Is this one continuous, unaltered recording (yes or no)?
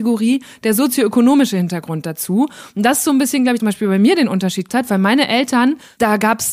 no